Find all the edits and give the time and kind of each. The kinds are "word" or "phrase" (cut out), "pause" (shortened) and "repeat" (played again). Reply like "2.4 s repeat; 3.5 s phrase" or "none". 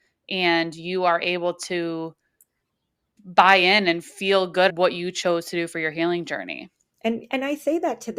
3.2 s word; 4.7 s word